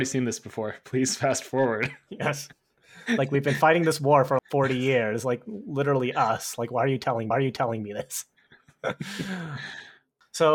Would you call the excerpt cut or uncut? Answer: cut